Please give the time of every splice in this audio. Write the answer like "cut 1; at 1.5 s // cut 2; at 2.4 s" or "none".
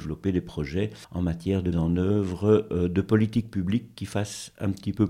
cut 1; at 1.0 s // cut 2; at 1.7 s